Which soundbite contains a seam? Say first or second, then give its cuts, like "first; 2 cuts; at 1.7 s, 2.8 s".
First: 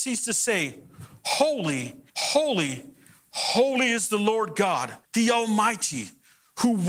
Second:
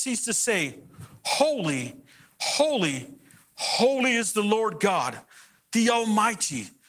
first; 2 cuts; at 2.1 s, 5.0 s